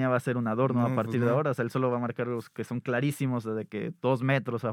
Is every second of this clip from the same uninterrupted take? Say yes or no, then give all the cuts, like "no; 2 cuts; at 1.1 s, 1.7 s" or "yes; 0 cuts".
yes; 0 cuts